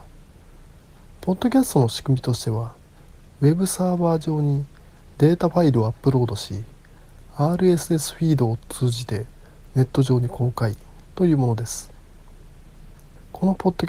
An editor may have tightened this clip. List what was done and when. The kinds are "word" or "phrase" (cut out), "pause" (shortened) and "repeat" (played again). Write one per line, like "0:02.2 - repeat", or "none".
none